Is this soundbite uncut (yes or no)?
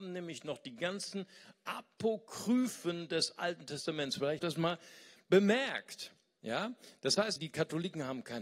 no